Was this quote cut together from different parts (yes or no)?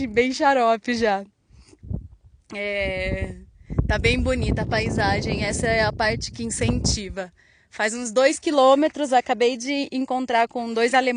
no